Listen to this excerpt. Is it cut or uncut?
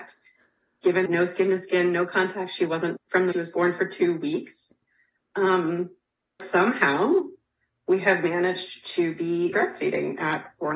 cut